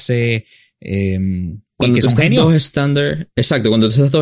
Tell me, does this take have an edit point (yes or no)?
yes